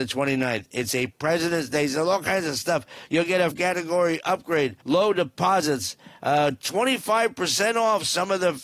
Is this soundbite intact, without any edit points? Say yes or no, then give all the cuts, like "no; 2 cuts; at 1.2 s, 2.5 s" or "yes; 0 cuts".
no; 2 cuts; at 3.5 s, 4.8 s